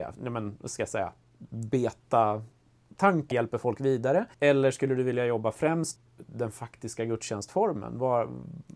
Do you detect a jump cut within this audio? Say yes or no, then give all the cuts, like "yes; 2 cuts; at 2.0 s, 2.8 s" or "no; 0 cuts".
yes; 3 cuts; at 3.3 s, 4.3 s, 6.0 s